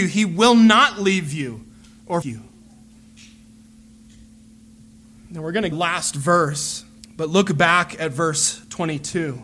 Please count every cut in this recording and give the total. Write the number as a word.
three